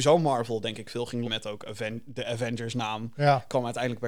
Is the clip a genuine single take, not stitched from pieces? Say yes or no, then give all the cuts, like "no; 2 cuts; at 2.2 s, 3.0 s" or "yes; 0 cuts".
no; 1 cut; at 1.2 s